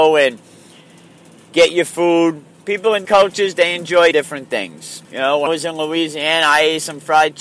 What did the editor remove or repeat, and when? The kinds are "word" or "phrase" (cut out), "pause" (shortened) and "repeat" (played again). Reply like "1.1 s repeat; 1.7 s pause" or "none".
3.0 s word; 4.1 s word; 5.0 s pause; 5.5 s word